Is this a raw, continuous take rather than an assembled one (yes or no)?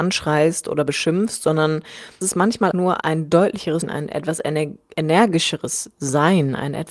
no